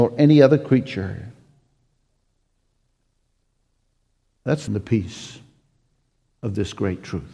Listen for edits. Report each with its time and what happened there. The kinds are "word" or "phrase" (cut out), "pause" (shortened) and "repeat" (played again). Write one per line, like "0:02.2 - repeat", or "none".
0:04.7 - phrase